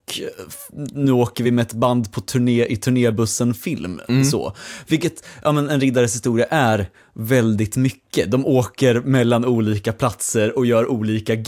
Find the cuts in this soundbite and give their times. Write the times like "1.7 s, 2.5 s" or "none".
none